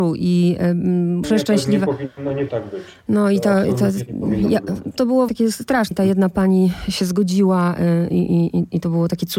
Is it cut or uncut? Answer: cut